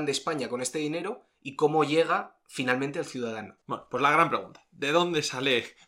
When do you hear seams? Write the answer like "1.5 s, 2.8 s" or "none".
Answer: 3.6 s